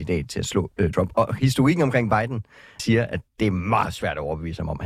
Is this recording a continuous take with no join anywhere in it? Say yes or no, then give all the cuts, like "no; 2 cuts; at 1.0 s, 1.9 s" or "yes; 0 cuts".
no; 3 cuts; at 0.9 s, 2.8 s, 3.3 s